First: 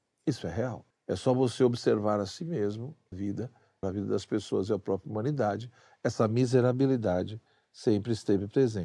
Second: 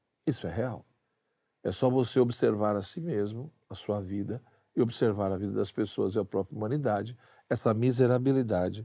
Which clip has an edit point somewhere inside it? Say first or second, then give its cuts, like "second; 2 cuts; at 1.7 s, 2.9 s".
first; 3 cuts; at 0.9 s, 3.1 s, 3.8 s